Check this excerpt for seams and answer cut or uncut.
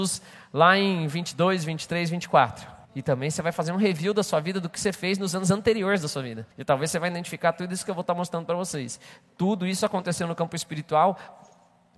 cut